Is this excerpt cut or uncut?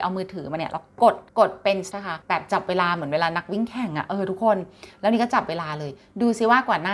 cut